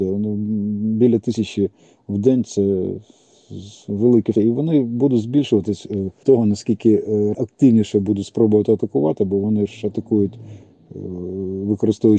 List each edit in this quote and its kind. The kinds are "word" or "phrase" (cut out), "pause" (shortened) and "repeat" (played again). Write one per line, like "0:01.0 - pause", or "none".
0:04.3 - word
0:06.2 - word
0:07.3 - word